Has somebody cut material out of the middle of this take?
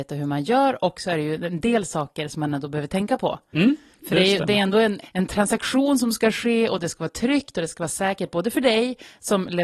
yes; 1 cut; at 5.0 s

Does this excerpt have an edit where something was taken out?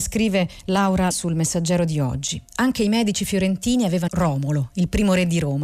yes; 2 cuts; at 1.1 s, 4.1 s

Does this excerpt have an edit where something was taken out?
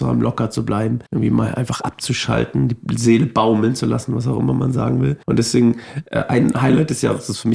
yes; 2 cuts; at 1.1 s, 5.2 s

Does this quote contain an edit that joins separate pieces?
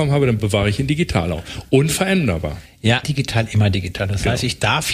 yes; 1 cut; at 3.0 s

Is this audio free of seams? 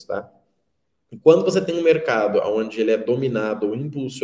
yes; 0 cuts

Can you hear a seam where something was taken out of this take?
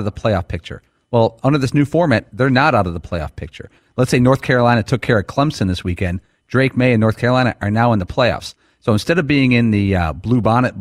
no; 0 cuts

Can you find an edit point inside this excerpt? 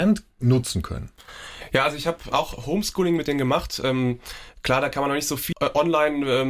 yes; 2 cuts; at 2.3 s, 5.5 s

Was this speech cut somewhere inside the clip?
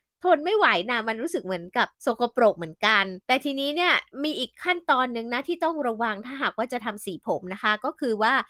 yes; 2 cuts; at 1.9 s, 3.2 s

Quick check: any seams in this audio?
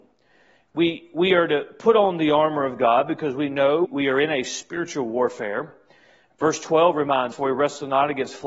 yes; 2 cuts; at 3.8 s, 7.3 s

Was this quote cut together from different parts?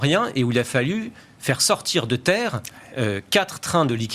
no; 0 cuts

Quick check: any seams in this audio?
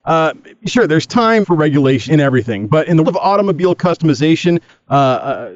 yes; 3 cuts; at 1.4 s, 2.1 s, 3.0 s

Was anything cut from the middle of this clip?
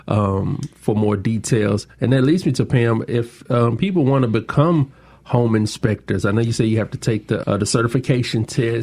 yes; 1 cut; at 7.4 s

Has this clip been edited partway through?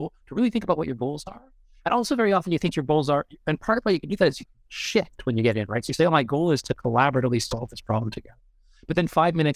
no; 0 cuts

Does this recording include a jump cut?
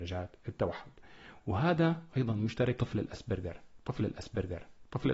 yes; 3 cuts; at 2.1 s, 2.8 s, 4.0 s

